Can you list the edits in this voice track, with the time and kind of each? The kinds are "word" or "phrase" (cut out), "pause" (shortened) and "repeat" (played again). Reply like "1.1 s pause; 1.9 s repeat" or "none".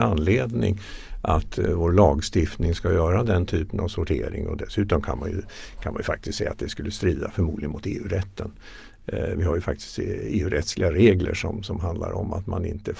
none